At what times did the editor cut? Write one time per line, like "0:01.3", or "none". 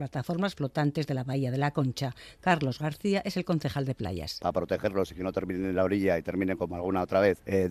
none